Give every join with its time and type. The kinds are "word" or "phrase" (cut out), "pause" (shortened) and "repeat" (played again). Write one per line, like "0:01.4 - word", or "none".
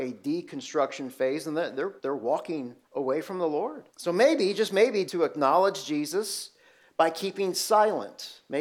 0:02.0 - pause
0:02.8 - pause
0:03.9 - pause
0:05.1 - phrase